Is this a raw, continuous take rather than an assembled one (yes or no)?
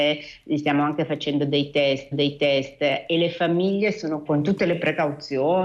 no